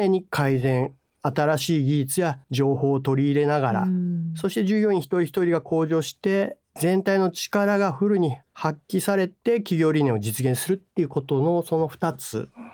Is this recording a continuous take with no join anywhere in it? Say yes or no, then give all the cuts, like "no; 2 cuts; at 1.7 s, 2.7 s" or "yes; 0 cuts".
no; 2 cuts; at 2.4 s, 8.4 s